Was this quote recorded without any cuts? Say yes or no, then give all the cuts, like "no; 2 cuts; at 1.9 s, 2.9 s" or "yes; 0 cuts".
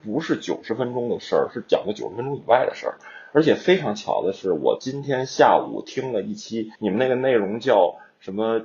no; 1 cut; at 6.8 s